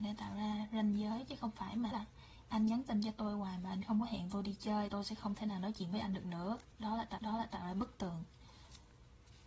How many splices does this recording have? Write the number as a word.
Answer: three